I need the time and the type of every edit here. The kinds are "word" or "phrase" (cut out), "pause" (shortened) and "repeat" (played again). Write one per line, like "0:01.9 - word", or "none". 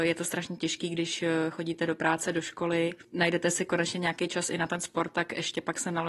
0:03.0 - pause